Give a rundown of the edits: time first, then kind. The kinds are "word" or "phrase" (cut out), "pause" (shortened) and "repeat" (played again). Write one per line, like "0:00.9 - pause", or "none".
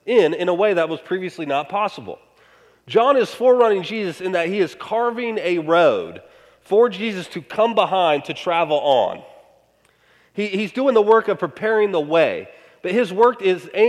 none